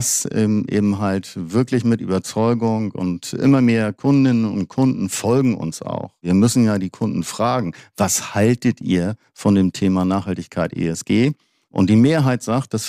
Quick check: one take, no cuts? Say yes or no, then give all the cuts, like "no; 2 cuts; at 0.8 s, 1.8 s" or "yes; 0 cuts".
yes; 0 cuts